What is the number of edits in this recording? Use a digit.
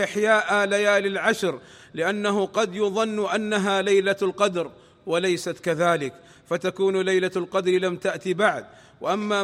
0